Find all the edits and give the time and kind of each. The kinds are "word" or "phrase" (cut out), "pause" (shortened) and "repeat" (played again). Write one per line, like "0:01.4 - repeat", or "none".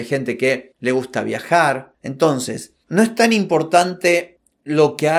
0:02.8 - pause